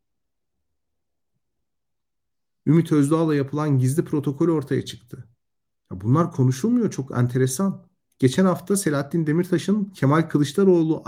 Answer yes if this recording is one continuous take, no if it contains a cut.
yes